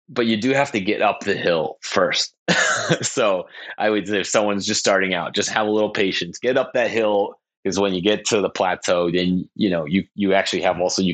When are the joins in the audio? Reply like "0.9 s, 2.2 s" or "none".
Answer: none